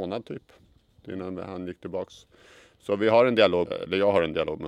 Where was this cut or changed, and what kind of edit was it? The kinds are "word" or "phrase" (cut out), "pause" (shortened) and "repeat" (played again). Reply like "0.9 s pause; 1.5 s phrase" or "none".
3.7 s word